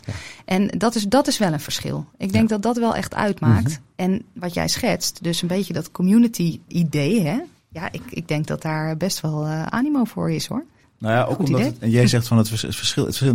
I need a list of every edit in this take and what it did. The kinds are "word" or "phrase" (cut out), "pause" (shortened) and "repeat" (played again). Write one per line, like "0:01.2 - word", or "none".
0:06.7 - word
0:10.8 - pause

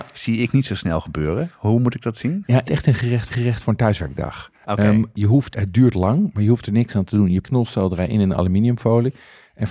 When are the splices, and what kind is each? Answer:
0:02.6 - phrase
0:03.3 - repeat
0:05.1 - word
0:05.5 - word
0:07.4 - phrase

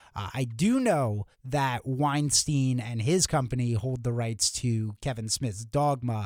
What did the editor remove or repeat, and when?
0:01.3 - pause

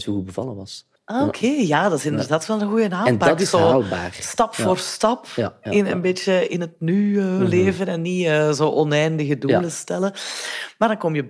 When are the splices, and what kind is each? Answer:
0:01.0 - pause

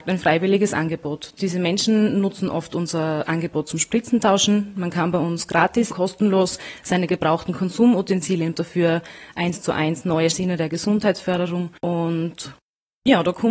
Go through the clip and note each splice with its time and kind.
0:05.9 - word
0:08.5 - phrase
0:10.3 - phrase
0:11.8 - pause

